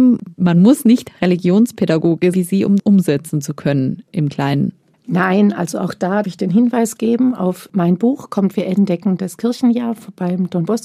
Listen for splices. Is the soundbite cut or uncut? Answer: cut